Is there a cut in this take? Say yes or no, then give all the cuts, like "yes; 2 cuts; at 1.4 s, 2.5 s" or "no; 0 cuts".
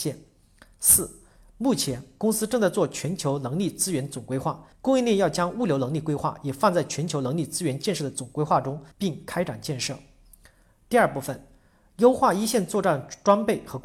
yes; 2 cuts; at 4.7 s, 8.9 s